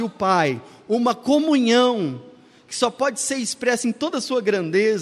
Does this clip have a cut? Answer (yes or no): no